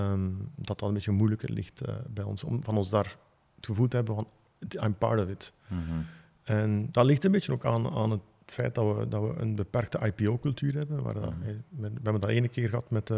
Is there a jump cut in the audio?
no; 0 cuts

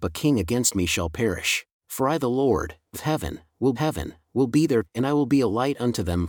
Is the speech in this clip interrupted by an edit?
yes; 4 cuts; at 1.7 s, 2.9 s, 3.8 s, 4.8 s

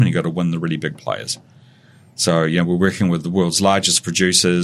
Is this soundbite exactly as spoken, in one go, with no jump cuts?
yes; 0 cuts

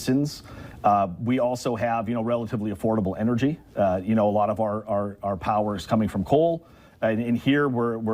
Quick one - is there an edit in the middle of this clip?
no; 0 cuts

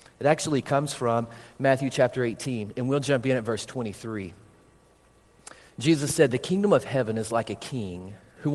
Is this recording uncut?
yes; 0 cuts

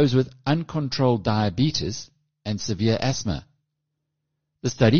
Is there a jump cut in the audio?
no; 0 cuts

